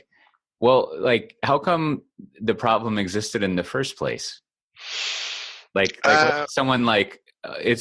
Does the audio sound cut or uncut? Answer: uncut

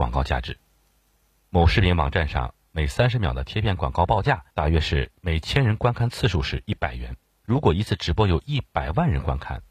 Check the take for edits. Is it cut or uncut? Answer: cut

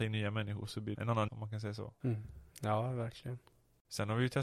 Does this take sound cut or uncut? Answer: cut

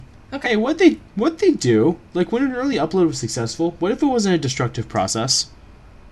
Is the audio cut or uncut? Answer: uncut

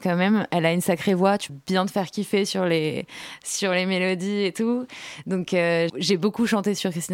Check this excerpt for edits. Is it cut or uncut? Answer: cut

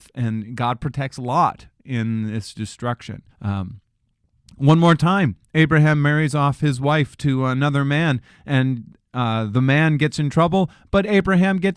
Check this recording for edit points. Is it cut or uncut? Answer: cut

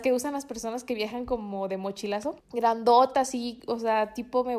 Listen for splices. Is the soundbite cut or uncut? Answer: cut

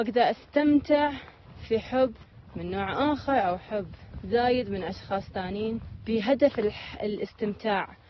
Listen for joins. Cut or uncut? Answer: uncut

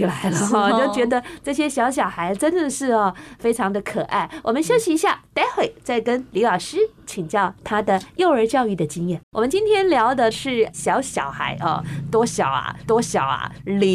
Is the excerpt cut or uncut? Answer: cut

